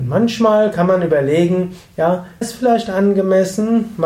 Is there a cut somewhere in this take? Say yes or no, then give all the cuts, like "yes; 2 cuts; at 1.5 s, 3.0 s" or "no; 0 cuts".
yes; 1 cut; at 2.4 s